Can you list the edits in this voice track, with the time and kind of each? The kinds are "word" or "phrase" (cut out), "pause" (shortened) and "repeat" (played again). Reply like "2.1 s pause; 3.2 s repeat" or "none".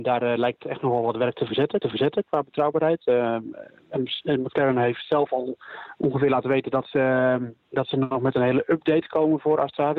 1.8 s repeat